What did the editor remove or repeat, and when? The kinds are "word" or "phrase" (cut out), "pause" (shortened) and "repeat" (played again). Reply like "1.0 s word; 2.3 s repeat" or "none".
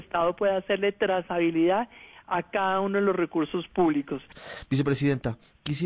none